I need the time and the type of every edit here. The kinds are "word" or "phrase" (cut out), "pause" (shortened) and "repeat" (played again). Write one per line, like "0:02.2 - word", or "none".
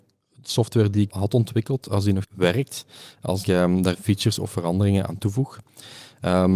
0:01.1 - word
0:02.2 - word
0:03.4 - word
0:03.9 - word
0:05.1 - word

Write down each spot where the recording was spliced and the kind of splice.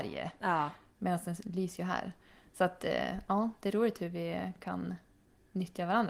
none

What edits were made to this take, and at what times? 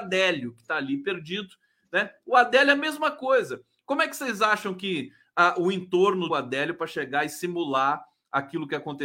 0:06.3 - phrase

